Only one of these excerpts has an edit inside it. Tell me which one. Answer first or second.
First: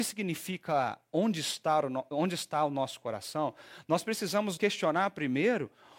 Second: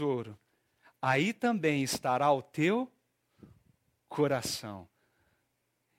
first